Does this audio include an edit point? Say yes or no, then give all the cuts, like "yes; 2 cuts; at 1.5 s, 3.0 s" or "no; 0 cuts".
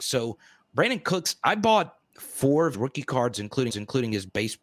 yes; 2 cuts; at 2.7 s, 3.7 s